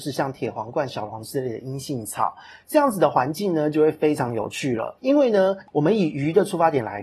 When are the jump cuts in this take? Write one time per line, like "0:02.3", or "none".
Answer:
0:05.0